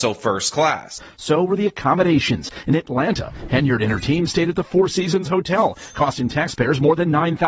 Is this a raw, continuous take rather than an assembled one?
yes; 0 cuts

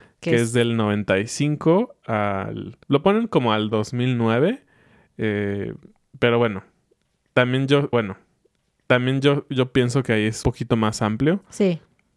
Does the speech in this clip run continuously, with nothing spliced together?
no; 3 cuts; at 2.8 s, 7.9 s, 10.4 s

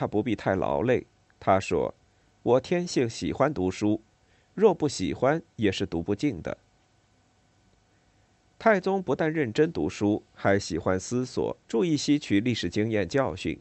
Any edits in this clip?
yes; 1 cut; at 11.6 s

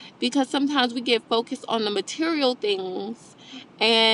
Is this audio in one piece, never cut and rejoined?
yes; 0 cuts

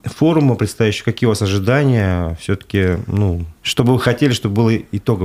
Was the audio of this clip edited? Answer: yes; 1 cut; at 3.6 s

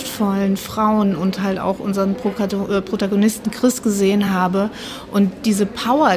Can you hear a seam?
no; 0 cuts

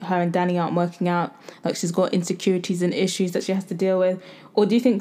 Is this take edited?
no; 0 cuts

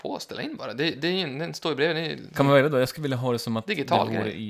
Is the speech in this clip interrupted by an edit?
no; 0 cuts

